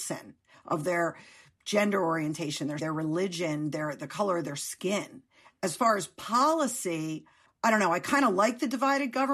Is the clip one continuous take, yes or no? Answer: no